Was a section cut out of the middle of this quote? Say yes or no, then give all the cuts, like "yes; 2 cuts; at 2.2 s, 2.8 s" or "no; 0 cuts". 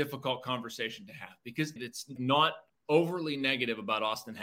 yes; 3 cuts; at 1.8 s, 2.2 s, 2.7 s